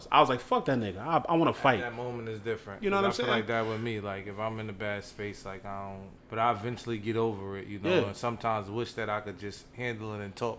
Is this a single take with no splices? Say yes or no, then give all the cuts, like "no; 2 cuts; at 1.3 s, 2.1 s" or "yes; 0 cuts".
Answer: no; 1 cut; at 6.2 s